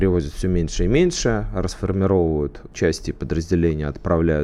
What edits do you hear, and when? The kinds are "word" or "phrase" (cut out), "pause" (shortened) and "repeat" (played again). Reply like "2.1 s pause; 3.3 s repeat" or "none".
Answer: 2.7 s word